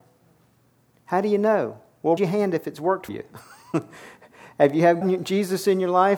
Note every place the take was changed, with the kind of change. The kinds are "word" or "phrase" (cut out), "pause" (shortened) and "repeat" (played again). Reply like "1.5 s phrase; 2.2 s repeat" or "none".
2.2 s word; 3.1 s word; 5.0 s word